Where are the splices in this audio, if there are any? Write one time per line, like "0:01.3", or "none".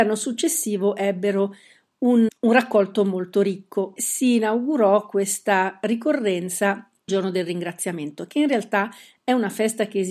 0:02.3
0:04.0
0:07.1